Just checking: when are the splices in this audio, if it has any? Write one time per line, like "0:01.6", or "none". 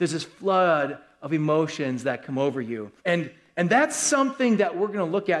0:03.0